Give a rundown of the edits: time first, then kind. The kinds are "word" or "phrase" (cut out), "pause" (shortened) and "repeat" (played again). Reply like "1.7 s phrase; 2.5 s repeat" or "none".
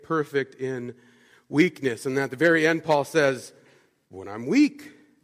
none